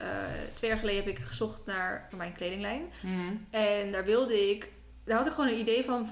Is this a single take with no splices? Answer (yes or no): no